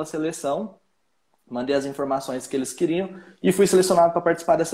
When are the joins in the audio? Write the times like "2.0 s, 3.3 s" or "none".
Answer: none